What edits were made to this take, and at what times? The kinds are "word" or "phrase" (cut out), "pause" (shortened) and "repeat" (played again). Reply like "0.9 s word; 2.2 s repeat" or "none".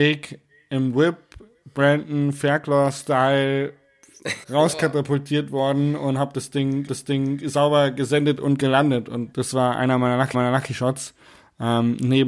4.4 s phrase; 6.9 s repeat; 9.3 s word; 10.3 s repeat